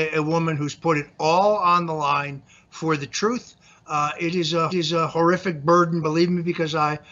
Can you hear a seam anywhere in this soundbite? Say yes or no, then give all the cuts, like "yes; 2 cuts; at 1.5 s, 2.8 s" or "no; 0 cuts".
yes; 1 cut; at 4.7 s